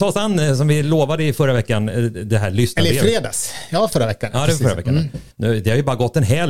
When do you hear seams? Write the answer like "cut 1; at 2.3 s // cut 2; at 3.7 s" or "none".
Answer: cut 1; at 5.3 s

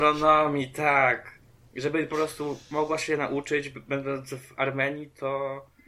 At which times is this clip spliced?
none

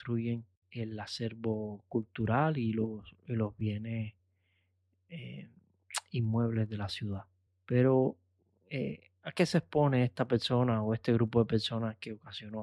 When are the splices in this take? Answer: none

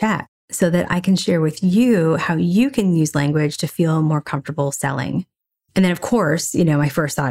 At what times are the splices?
none

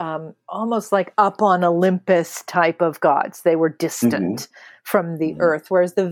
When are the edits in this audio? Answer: none

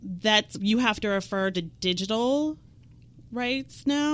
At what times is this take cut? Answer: cut 1; at 1.5 s

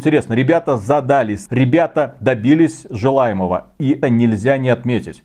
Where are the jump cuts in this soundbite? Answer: cut 1; at 1.5 s // cut 2; at 4.0 s

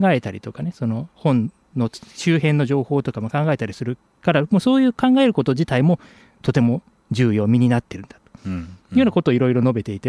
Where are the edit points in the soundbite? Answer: cut 1; at 8.4 s

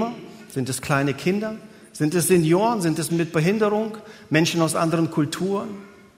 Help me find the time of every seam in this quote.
cut 1; at 3.1 s

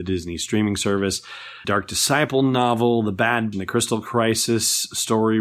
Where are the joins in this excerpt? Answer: cut 1; at 1.6 s // cut 2; at 3.5 s

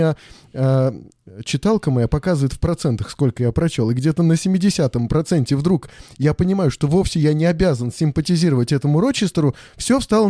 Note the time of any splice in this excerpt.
none

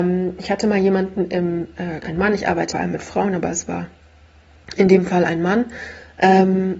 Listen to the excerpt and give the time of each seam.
cut 1; at 2.0 s // cut 2; at 2.7 s

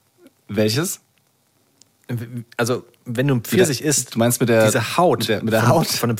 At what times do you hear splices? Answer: none

